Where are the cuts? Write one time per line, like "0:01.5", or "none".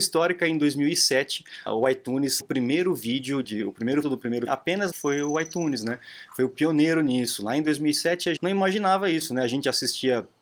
0:01.7
0:02.4
0:03.4
0:04.0
0:04.5
0:04.9
0:08.4